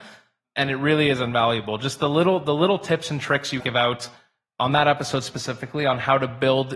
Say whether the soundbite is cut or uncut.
cut